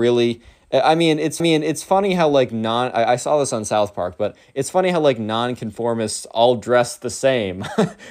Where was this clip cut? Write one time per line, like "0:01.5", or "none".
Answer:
0:01.4